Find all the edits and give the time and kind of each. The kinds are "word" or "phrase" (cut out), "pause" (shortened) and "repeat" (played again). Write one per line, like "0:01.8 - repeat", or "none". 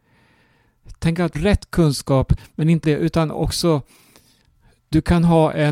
0:01.3 - phrase
0:02.8 - word